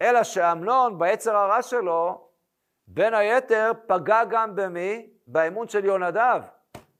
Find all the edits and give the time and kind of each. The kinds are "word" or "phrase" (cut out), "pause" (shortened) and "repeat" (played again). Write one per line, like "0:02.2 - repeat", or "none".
none